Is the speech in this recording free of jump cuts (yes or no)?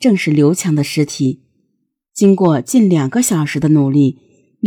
yes